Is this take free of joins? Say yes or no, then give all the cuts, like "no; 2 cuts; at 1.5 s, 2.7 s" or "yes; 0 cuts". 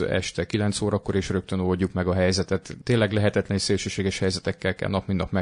yes; 0 cuts